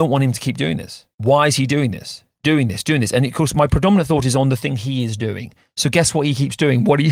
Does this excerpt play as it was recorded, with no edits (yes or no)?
yes